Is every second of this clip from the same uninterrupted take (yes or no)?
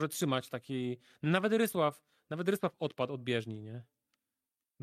yes